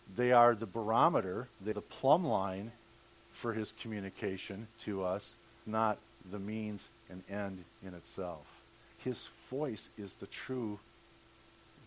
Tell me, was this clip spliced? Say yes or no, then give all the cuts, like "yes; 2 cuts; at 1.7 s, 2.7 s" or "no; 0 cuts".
yes; 3 cuts; at 1.7 s, 4.7 s, 5.6 s